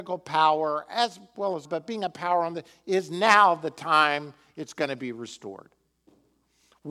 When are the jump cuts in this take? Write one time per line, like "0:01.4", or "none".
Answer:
0:01.6